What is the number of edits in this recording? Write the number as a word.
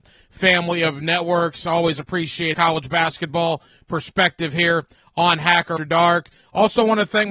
two